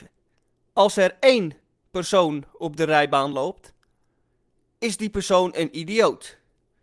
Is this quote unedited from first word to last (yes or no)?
yes